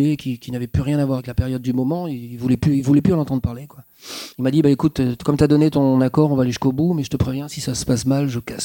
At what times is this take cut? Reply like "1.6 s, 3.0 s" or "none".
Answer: 4.3 s